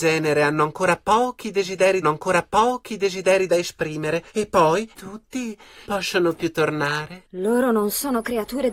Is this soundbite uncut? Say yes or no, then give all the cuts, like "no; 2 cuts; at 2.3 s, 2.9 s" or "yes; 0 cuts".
no; 4 cuts; at 2.0 s, 4.3 s, 4.9 s, 5.8 s